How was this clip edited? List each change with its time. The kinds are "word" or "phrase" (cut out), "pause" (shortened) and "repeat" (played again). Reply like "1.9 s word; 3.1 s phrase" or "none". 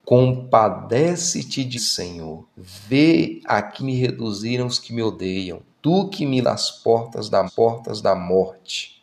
1.8 s word; 2.5 s pause; 3.8 s word; 5.7 s pause; 6.4 s word; 7.5 s repeat